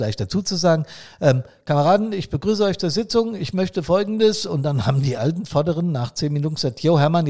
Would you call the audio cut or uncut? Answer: uncut